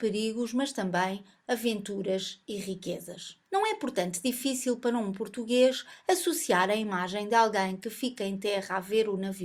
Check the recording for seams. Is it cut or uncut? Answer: cut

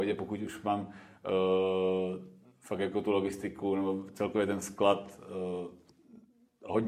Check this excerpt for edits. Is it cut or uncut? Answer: uncut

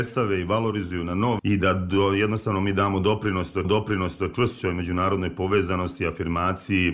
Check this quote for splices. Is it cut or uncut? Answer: cut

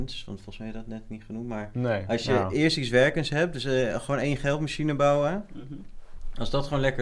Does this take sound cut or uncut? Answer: uncut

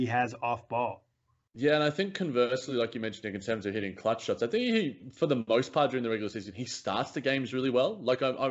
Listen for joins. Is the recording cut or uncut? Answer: uncut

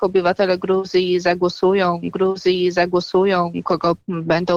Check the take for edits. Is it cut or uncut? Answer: cut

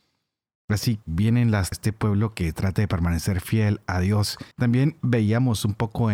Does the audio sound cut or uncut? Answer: cut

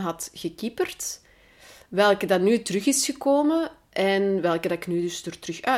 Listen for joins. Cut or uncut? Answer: uncut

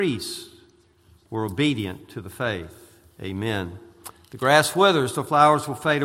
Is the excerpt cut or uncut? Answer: uncut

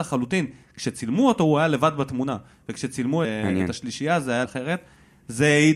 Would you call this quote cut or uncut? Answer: cut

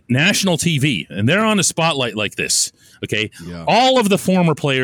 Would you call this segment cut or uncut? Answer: uncut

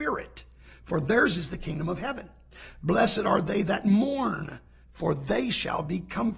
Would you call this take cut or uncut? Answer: uncut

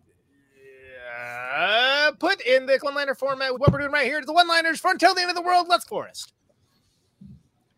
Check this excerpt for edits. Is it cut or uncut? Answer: cut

